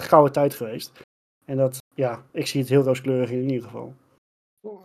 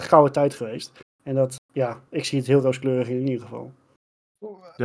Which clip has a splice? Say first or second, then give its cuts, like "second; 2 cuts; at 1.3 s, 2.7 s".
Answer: second; 1 cut; at 1.0 s